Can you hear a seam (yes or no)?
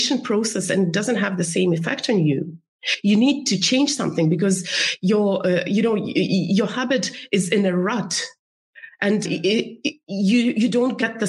yes